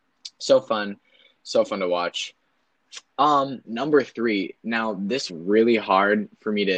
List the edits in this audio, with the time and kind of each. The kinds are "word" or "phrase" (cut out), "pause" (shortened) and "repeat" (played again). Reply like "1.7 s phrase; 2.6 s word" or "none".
3.6 s word; 5.3 s phrase